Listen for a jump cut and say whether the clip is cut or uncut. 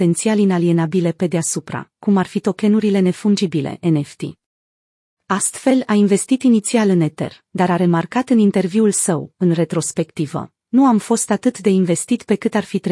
uncut